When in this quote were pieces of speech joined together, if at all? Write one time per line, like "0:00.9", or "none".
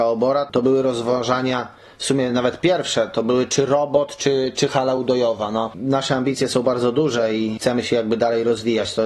none